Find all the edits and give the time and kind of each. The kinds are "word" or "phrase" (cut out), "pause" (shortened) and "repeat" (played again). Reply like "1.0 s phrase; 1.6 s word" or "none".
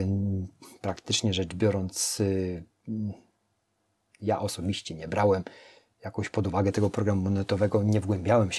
none